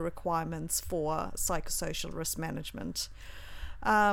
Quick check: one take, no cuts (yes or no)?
yes